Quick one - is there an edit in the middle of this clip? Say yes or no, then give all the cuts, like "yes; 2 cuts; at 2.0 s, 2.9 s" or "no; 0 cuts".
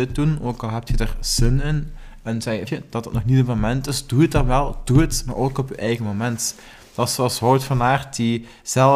yes; 1 cut; at 2.7 s